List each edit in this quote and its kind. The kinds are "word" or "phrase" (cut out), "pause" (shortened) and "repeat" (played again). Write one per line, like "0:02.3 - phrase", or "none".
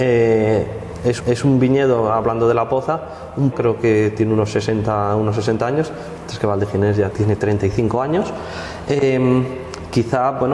0:01.2 - repeat
0:03.5 - phrase
0:07.1 - word